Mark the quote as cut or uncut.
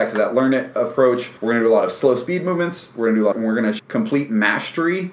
cut